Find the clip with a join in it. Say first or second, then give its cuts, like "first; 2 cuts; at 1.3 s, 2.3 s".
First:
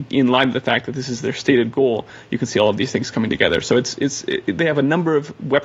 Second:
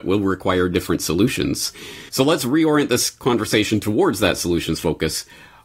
second; 1 cut; at 2.1 s